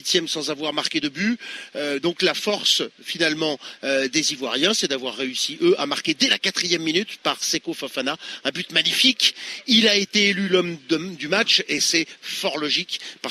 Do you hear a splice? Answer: no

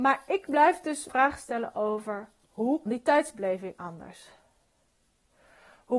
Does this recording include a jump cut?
yes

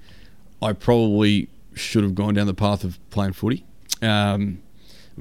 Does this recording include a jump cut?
no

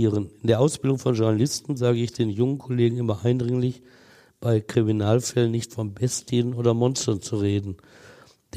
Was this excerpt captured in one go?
yes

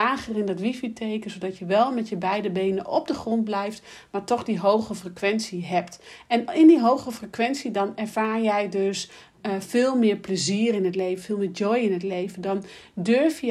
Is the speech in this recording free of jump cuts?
yes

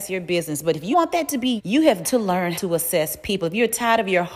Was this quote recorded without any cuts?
no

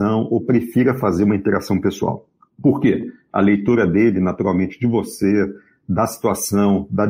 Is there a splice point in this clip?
no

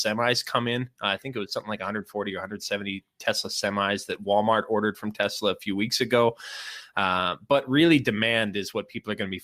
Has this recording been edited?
no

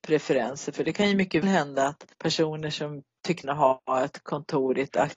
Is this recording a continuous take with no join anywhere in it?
no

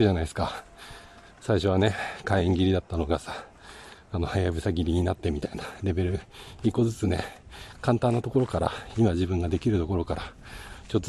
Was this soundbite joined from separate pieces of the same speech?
no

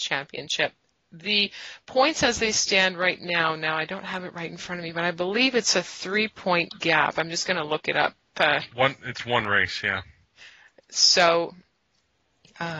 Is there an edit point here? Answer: no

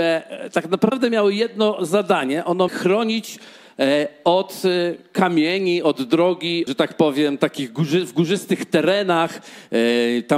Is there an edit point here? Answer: yes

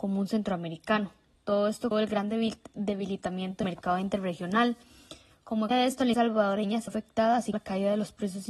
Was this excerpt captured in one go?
no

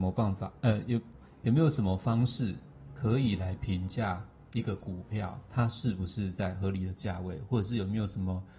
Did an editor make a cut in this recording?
yes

